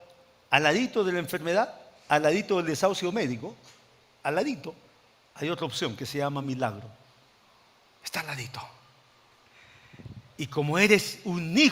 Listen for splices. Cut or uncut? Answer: uncut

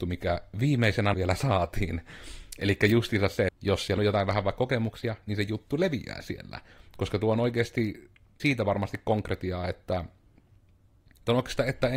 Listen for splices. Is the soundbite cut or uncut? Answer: cut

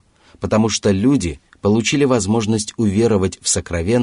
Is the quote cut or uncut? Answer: uncut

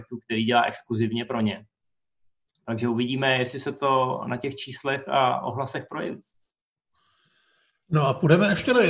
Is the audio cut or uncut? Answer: uncut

